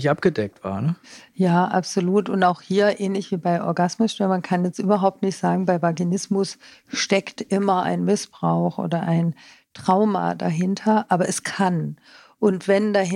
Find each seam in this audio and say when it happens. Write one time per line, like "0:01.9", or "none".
none